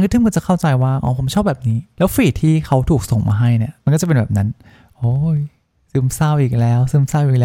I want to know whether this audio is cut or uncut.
uncut